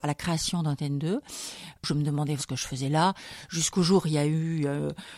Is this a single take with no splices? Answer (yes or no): no